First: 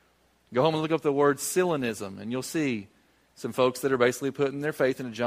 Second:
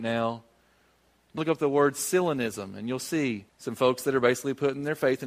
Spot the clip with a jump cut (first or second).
second